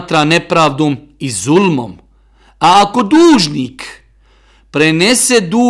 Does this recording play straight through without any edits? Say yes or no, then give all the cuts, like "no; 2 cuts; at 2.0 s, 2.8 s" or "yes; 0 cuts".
yes; 0 cuts